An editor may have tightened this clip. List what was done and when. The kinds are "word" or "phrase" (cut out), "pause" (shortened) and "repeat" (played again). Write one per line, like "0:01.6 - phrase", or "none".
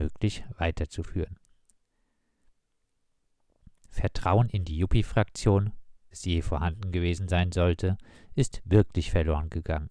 0:06.1 - word

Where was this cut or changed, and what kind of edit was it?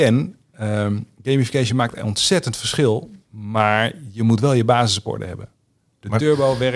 none

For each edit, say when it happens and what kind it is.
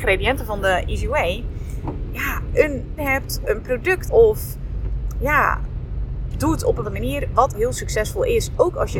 0:03.0 - word
0:03.4 - word
0:04.0 - word
0:06.3 - word
0:06.8 - word
0:07.5 - word

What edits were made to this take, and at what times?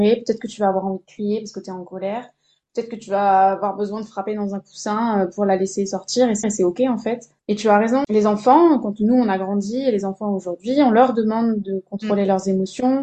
0:06.4 - repeat
0:07.4 - pause

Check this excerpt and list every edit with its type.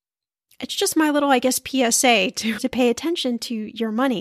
0:02.6 - word

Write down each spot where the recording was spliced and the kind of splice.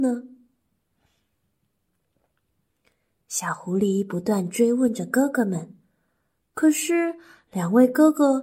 none

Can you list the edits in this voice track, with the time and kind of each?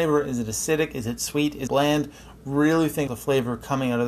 0:01.7 - word
0:03.1 - word

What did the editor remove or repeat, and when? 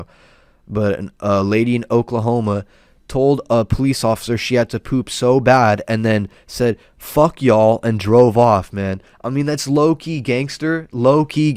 none

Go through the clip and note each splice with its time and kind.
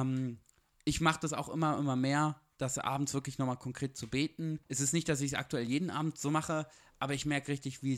0:04.6 - pause

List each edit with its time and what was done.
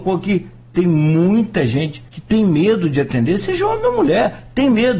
0:02.1 - pause

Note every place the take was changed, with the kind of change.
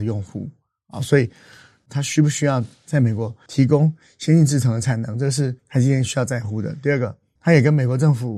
0:05.6 - pause

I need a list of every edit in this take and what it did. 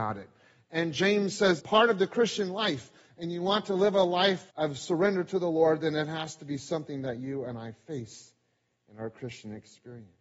0:01.6 - phrase
0:04.5 - pause

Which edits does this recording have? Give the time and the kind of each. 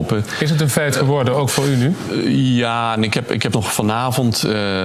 0:03.5 - word

